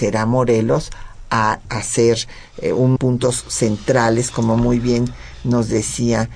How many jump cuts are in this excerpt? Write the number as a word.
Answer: two